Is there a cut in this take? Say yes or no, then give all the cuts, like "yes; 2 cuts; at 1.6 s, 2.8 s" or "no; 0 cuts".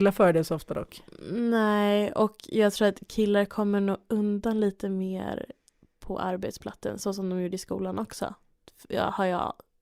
no; 0 cuts